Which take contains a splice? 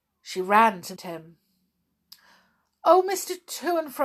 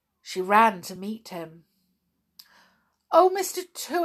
first; 1 cut; at 1.0 s

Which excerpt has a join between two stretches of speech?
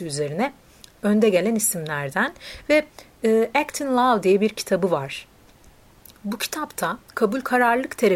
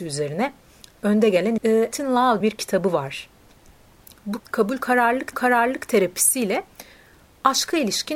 second; 5 cuts; at 1.6 s, 1.9 s, 2.4 s, 4.4 s, 5.3 s

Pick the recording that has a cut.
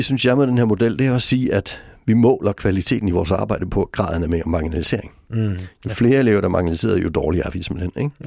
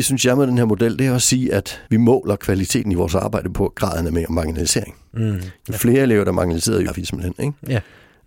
second; 2 cuts; at 1.9 s, 6.9 s

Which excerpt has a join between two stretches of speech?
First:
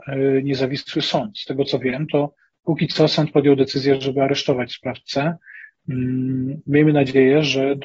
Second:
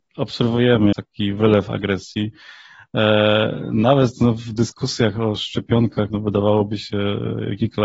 second; 2 cuts; at 0.9 s, 6.1 s

